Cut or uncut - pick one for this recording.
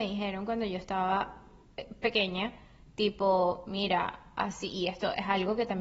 uncut